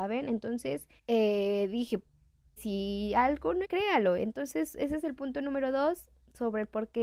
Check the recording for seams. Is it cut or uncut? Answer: cut